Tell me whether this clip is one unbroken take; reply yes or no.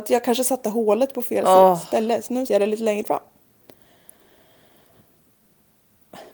no